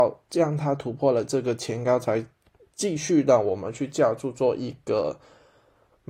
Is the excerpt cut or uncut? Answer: uncut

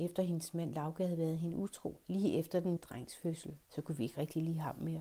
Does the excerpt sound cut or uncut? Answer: cut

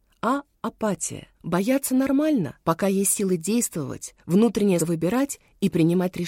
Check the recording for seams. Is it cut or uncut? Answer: cut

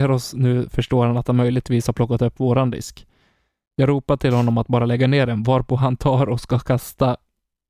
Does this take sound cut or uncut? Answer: uncut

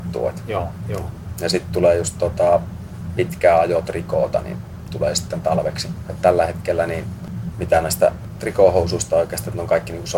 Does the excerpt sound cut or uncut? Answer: uncut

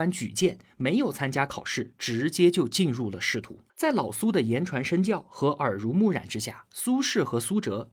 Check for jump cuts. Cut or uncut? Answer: cut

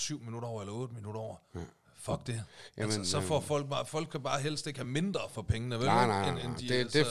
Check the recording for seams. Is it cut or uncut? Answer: uncut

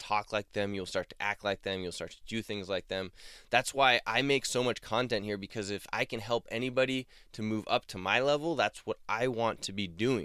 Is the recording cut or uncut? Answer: uncut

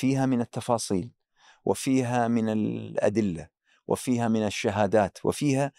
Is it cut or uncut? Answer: uncut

